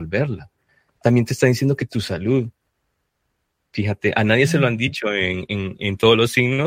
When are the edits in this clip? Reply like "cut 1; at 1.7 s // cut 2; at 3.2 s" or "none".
cut 1; at 1.9 s